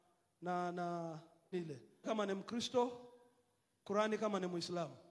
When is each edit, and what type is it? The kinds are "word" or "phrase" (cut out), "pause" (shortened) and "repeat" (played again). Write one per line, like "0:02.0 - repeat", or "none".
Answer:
0:01.5 - word
0:02.0 - word

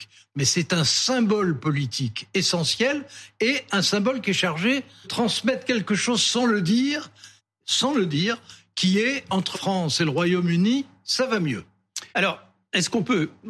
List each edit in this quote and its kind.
0:05.0 - word
0:07.4 - pause
0:09.5 - word
0:12.1 - pause

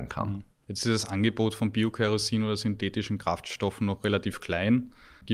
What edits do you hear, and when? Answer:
none

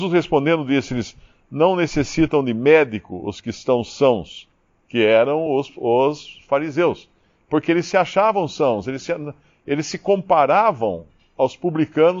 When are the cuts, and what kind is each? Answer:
none

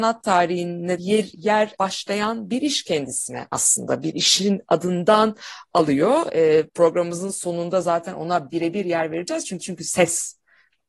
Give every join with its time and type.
0:01.0 - word
0:01.8 - word
0:06.7 - pause
0:09.6 - repeat

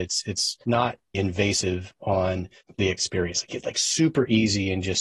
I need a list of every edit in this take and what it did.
0:01.1 - word
0:02.7 - phrase
0:03.5 - word

